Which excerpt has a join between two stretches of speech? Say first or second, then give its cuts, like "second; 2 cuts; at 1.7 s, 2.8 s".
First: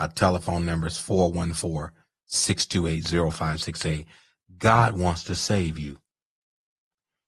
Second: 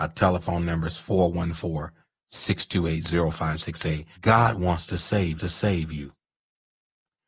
second; 2 cuts; at 4.2 s, 5.4 s